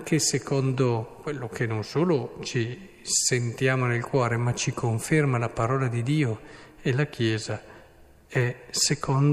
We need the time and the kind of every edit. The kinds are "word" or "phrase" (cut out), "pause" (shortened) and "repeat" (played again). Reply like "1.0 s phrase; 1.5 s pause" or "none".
none